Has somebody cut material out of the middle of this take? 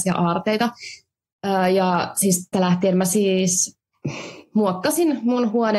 yes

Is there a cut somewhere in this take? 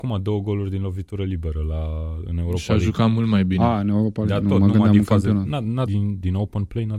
yes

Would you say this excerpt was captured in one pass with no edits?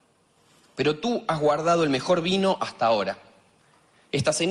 yes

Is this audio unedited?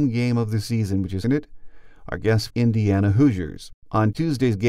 no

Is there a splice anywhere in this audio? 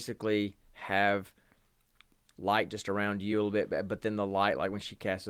no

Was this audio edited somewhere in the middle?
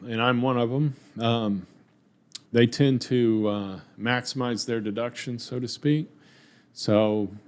yes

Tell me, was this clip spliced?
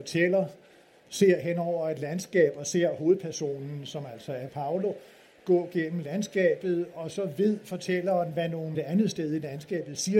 yes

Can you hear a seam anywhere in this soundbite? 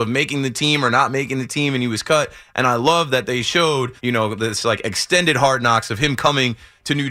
yes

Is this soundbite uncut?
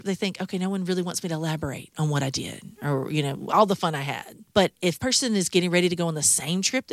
no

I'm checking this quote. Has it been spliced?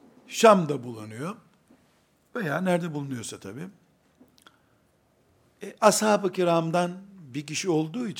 no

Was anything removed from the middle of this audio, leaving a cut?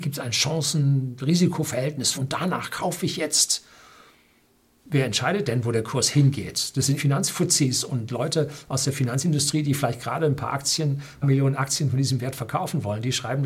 yes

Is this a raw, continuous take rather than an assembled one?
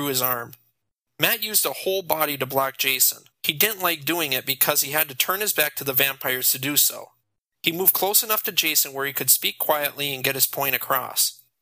no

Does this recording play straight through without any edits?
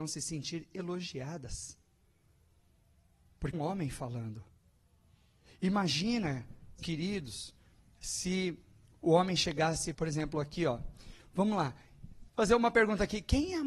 no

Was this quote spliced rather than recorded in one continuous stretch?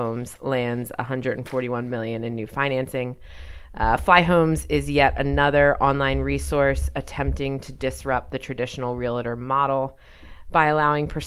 no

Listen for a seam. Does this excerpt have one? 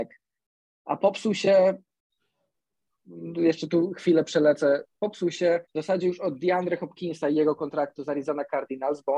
yes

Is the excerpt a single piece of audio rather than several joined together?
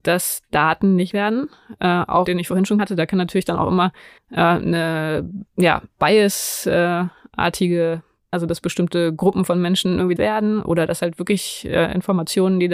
no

